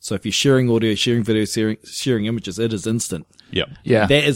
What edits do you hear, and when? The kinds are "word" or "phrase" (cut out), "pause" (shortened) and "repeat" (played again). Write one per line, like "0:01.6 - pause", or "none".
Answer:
none